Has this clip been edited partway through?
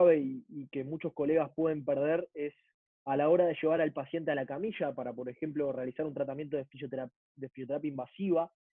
no; 0 cuts

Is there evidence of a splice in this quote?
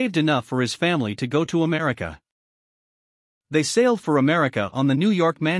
no; 0 cuts

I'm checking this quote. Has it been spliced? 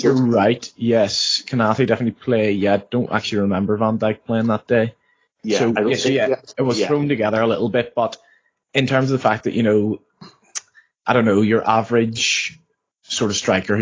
no; 0 cuts

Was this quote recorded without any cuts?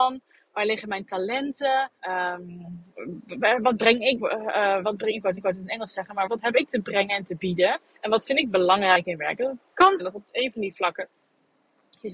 no; 6 cuts; at 2.0 s, 4.2 s, 5.4 s, 6.3 s, 7.9 s, 10.0 s

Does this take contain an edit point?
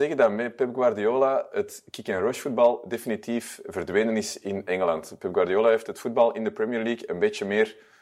no; 0 cuts

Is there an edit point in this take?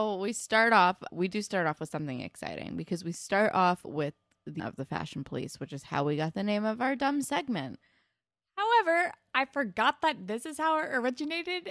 yes; 2 cuts; at 1.1 s, 4.6 s

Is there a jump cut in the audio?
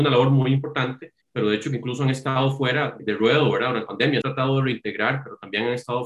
yes; 4 cuts; at 1.2 s, 3.0 s, 3.9 s, 4.2 s

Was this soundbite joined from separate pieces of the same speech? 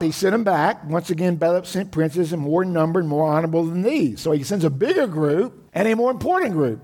yes; 1 cut; at 5.7 s

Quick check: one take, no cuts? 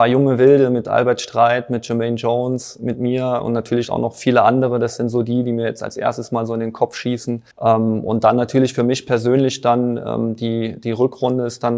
no; 1 cut; at 7.5 s

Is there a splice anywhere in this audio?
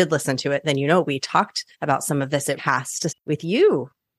yes; 3 cuts; at 1.7 s, 2.6 s, 3.1 s

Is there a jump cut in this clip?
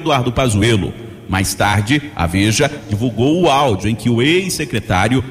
no; 0 cuts

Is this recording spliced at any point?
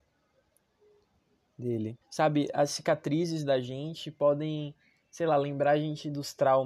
yes; 1 cut; at 2.0 s

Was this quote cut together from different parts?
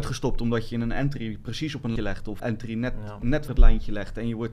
yes; 3 cuts; at 2.0 s, 2.4 s, 3.5 s

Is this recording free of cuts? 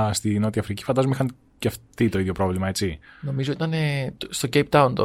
yes; 0 cuts

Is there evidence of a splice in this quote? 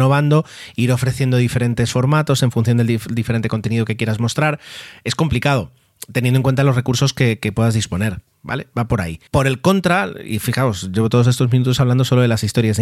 yes; 1 cut; at 9.3 s

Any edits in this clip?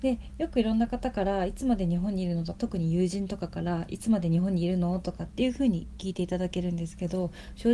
yes; 1 cut; at 2.6 s

